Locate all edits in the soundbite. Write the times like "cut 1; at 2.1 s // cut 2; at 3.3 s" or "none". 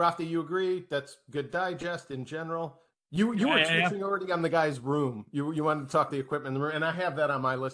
cut 1; at 6.1 s

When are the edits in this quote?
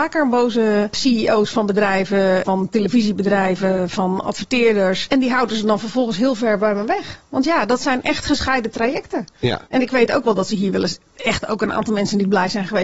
none

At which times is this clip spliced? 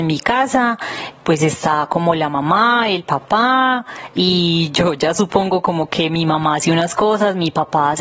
cut 1; at 1.1 s

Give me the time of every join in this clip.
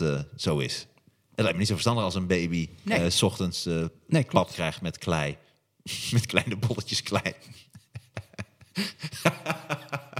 none

